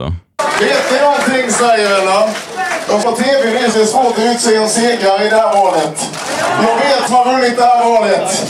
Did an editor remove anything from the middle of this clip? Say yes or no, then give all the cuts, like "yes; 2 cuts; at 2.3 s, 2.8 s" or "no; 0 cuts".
yes; 3 cuts; at 3.0 s, 3.7 s, 7.1 s